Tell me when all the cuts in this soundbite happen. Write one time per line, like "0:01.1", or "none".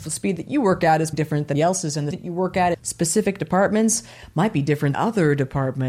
0:01.1
0:01.5
0:02.1
0:02.7
0:04.9